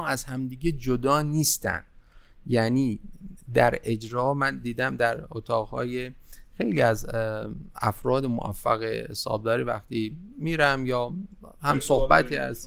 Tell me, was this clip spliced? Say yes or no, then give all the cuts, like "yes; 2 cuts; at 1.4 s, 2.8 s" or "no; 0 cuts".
no; 0 cuts